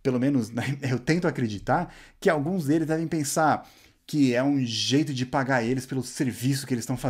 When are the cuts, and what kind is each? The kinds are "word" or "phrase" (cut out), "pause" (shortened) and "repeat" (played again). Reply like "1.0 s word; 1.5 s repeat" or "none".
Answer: none